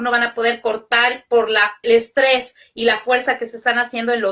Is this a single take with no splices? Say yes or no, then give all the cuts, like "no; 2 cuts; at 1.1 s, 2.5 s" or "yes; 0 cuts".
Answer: no; 1 cut; at 1.8 s